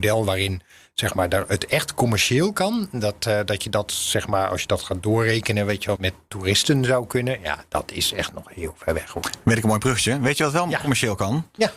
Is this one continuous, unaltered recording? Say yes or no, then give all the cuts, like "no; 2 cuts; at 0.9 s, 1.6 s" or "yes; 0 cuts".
no; 1 cut; at 6.0 s